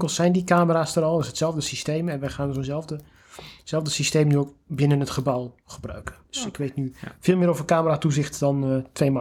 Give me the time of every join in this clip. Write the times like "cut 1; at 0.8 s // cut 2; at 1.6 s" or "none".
cut 1; at 6.2 s

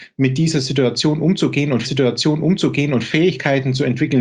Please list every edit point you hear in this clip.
cut 1; at 1.8 s

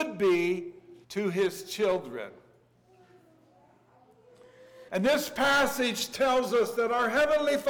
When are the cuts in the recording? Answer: cut 1; at 1.0 s // cut 2; at 4.9 s

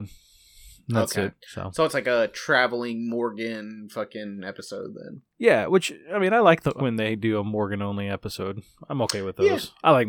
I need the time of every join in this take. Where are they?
cut 1; at 1.4 s // cut 2; at 6.8 s

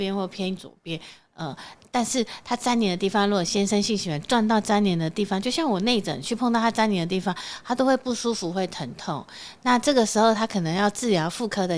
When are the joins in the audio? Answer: none

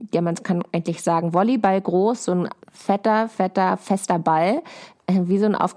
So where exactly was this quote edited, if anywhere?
cut 1; at 2.6 s

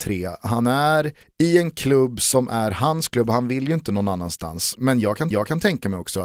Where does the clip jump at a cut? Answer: cut 1; at 1.2 s // cut 2; at 5.3 s

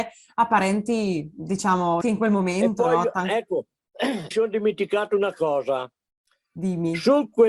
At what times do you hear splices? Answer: cut 1; at 2.0 s // cut 2; at 4.3 s

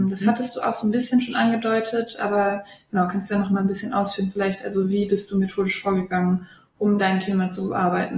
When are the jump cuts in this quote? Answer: none

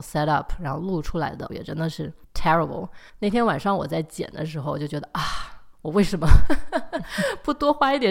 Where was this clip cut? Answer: cut 1; at 1.5 s

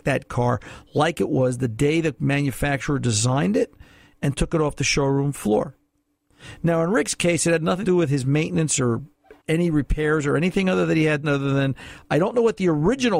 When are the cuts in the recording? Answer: cut 1; at 7.8 s // cut 2; at 9.4 s // cut 3; at 11.2 s

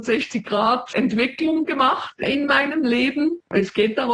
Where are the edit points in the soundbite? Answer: none

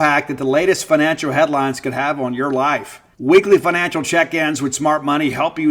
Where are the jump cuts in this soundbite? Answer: cut 1; at 3.1 s

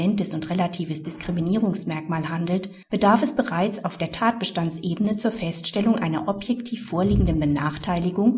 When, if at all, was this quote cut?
cut 1; at 2.8 s

